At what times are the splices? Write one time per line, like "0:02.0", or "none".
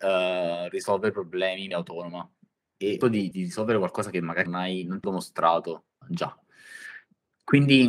0:01.7
0:03.0
0:03.3
0:04.5
0:05.0
0:06.0